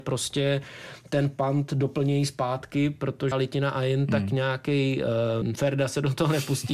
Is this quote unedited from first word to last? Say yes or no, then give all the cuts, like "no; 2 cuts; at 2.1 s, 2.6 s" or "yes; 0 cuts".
no; 2 cuts; at 3.3 s, 5.4 s